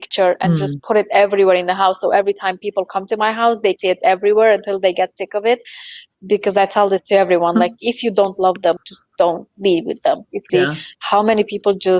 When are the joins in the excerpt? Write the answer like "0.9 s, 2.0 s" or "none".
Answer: 3.8 s, 8.8 s, 10.5 s